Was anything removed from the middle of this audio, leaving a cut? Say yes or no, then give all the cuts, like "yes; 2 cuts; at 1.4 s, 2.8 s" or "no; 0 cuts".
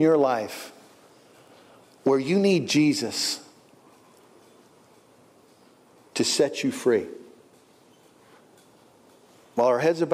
no; 0 cuts